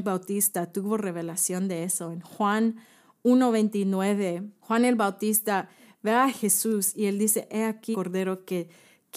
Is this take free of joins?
no; 1 cut; at 7.9 s

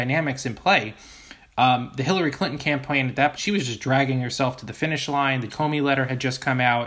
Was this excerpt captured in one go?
no; 2 cuts; at 3.4 s, 5.5 s

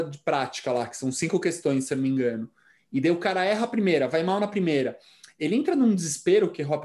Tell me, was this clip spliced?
no; 0 cuts

